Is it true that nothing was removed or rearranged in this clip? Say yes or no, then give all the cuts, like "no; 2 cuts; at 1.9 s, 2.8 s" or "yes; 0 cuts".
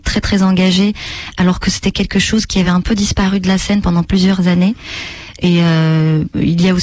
yes; 0 cuts